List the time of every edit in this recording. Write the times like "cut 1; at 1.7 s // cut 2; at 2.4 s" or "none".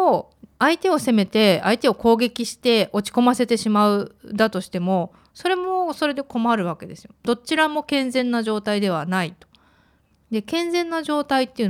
none